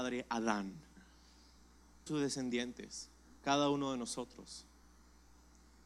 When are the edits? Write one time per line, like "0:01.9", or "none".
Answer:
0:02.1

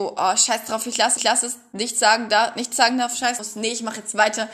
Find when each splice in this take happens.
0:01.2
0:03.4

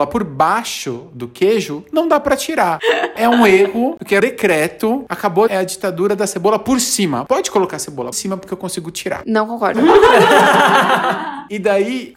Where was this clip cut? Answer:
0:03.2
0:04.2
0:05.5
0:08.1

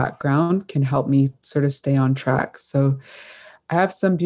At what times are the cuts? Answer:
none

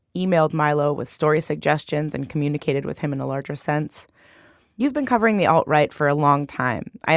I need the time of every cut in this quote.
none

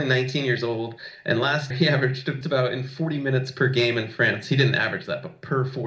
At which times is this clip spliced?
0:01.7
0:02.4

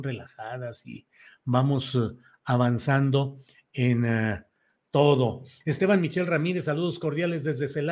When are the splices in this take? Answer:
none

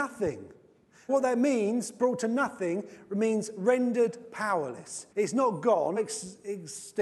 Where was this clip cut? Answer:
0:01.1
0:05.1
0:06.0

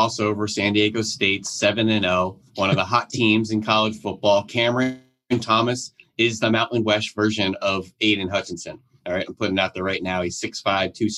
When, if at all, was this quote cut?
0:02.5

